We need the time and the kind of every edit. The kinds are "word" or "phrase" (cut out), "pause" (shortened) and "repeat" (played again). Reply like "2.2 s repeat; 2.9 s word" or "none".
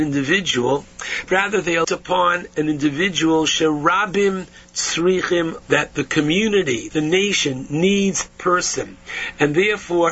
1.3 s word; 1.8 s word; 2.5 s word; 5.6 s word; 6.9 s word; 8.3 s word